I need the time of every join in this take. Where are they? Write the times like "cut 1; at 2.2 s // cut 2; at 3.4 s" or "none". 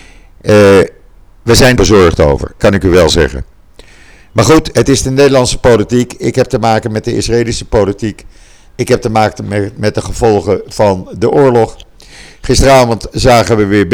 cut 1; at 1.8 s // cut 2; at 2.6 s // cut 3; at 4.7 s